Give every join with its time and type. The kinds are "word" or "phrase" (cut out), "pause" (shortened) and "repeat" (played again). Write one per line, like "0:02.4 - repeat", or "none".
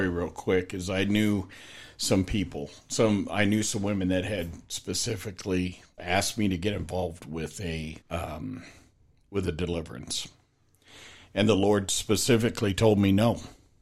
0:06.0 - word
0:08.0 - pause